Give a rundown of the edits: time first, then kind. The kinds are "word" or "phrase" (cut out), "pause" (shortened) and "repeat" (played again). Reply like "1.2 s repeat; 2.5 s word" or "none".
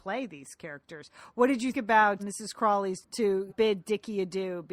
1.7 s word; 2.2 s word; 3.0 s word; 3.5 s word